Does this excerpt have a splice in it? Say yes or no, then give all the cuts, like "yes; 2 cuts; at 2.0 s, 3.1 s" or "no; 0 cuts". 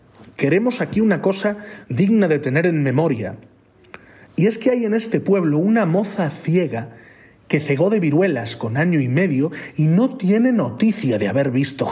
no; 0 cuts